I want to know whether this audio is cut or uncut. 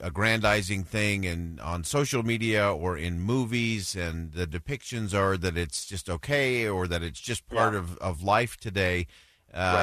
uncut